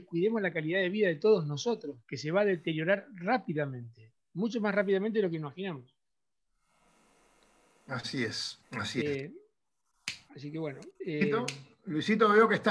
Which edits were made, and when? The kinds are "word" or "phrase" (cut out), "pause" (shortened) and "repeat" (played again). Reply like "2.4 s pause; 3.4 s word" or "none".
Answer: 2.0 s pause; 8.6 s pause; 10.3 s pause